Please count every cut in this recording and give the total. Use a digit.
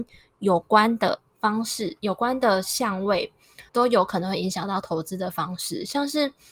2